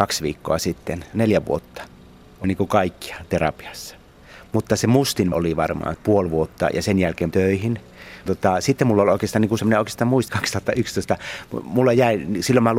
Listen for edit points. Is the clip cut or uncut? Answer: cut